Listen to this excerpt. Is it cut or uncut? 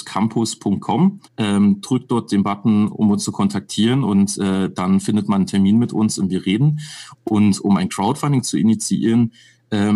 cut